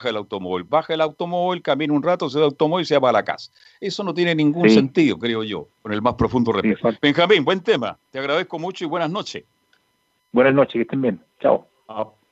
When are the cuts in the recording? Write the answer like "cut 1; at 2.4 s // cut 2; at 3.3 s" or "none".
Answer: cut 1; at 5.7 s